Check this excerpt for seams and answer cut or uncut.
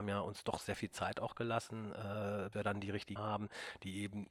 cut